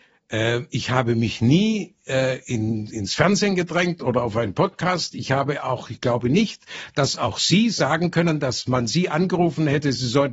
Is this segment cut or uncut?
uncut